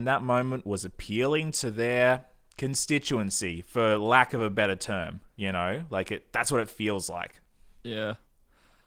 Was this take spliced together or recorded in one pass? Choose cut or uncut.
uncut